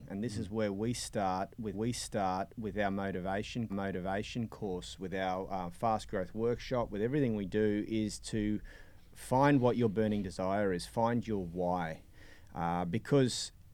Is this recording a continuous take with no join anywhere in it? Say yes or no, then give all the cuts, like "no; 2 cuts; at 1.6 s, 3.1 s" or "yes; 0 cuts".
no; 2 cuts; at 1.7 s, 3.7 s